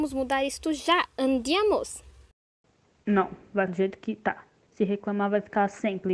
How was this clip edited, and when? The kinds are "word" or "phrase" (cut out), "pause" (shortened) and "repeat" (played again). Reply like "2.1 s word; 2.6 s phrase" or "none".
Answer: 3.7 s word